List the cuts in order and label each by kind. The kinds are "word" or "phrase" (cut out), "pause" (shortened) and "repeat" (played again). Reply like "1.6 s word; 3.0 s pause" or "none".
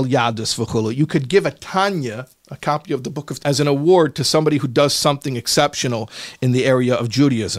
3.4 s word